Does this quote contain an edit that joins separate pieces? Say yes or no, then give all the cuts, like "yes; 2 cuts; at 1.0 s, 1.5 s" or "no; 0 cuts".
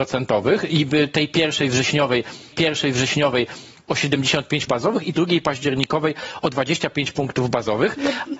yes; 3 cuts; at 2.5 s, 4.7 s, 5.1 s